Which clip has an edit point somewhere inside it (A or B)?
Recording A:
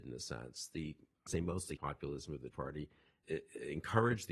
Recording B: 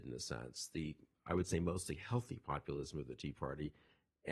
A